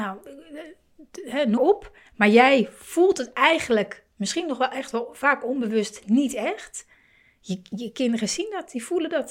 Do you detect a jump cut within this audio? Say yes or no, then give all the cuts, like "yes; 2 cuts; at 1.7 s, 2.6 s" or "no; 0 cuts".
yes; 2 cuts; at 1.6 s, 2.1 s